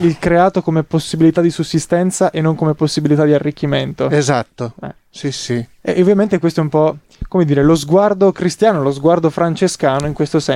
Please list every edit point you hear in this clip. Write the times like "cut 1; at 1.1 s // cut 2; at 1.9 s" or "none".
none